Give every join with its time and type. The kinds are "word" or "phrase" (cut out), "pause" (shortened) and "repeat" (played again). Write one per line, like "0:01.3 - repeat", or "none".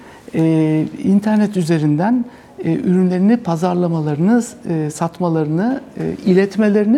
none